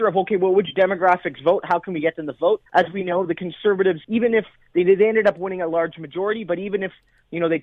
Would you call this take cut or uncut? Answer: cut